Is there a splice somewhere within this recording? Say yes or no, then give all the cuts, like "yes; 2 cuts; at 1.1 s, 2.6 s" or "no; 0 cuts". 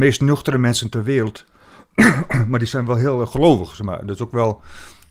no; 0 cuts